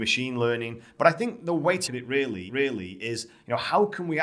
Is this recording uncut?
no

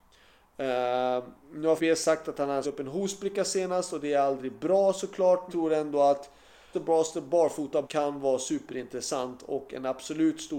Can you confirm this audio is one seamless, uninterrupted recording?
no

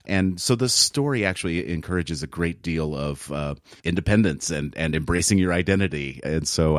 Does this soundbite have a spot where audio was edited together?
yes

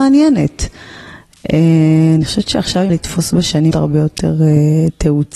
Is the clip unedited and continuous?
no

